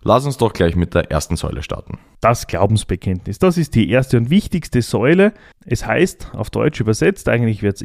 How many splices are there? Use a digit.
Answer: 0